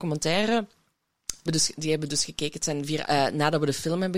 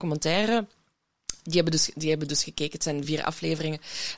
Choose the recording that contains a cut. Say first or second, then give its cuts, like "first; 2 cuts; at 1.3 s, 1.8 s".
first; 2 cuts; at 1.5 s, 3.0 s